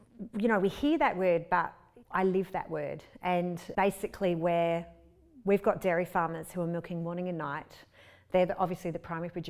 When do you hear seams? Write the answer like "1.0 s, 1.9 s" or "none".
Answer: 2.0 s, 3.7 s